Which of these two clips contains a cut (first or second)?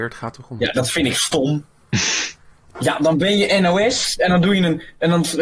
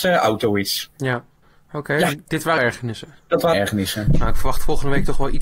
second